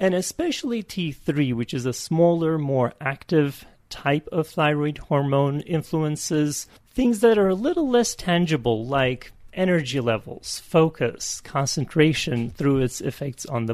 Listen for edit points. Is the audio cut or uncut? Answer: uncut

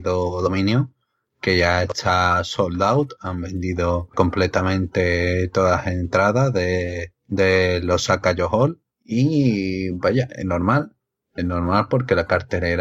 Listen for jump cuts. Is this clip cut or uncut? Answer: uncut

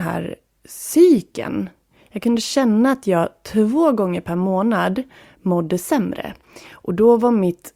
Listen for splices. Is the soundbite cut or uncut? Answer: uncut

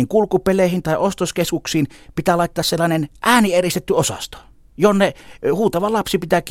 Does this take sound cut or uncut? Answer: uncut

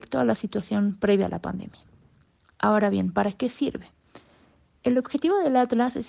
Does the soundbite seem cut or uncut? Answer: uncut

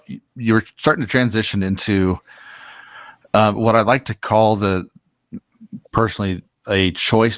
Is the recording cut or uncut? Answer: uncut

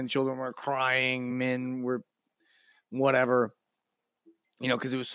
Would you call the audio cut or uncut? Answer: uncut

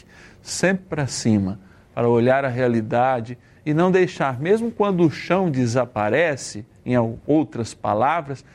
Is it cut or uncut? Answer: uncut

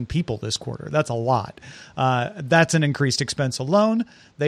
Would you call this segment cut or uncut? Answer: uncut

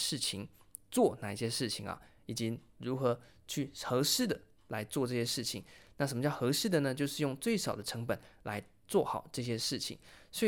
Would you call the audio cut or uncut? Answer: uncut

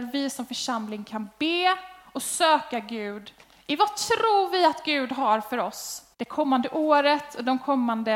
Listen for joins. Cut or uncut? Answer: cut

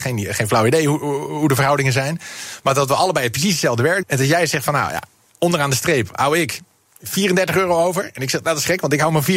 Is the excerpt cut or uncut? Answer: cut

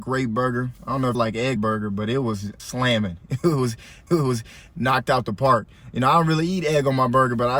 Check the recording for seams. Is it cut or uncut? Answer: cut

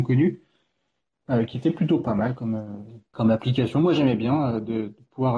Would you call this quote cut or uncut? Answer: uncut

